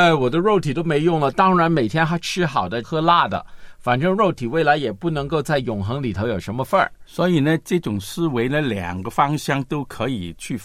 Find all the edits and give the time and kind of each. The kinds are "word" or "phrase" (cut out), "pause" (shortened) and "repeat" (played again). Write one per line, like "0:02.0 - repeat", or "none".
0:02.8 - phrase